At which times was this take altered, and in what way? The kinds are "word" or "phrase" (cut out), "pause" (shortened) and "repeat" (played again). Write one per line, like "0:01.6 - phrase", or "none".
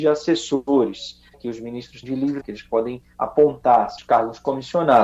0:01.3 - word
0:02.0 - word
0:02.4 - word
0:04.0 - word